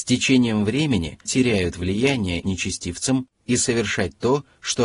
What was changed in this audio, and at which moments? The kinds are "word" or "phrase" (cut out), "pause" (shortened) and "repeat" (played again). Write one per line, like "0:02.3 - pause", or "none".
0:01.3 - word
0:02.4 - phrase